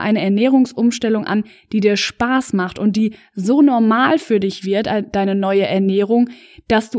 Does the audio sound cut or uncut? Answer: uncut